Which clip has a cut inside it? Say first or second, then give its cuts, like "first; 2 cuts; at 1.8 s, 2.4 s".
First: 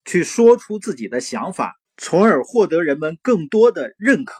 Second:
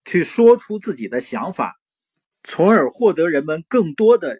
first; 1 cut; at 1.8 s